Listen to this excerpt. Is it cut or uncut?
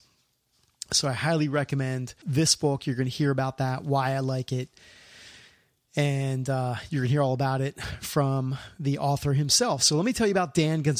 uncut